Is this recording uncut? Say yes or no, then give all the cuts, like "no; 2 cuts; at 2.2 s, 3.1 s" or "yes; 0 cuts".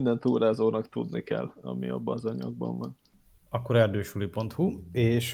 yes; 0 cuts